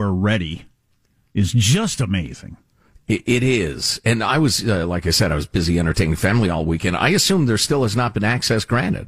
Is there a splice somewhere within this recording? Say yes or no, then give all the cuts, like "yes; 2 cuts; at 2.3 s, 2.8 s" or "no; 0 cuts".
no; 0 cuts